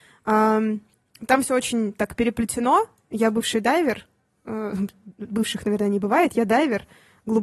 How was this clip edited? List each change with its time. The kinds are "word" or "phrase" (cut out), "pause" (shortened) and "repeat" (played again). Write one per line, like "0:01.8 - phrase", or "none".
none